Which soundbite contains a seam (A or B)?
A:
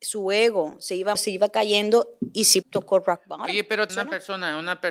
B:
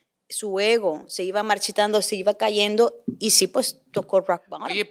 A